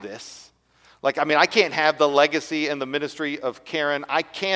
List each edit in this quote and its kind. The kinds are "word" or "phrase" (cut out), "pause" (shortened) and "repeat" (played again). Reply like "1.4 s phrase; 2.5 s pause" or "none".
none